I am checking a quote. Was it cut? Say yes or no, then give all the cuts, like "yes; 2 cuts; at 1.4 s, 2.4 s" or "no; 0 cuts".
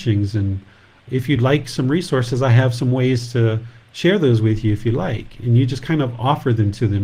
no; 0 cuts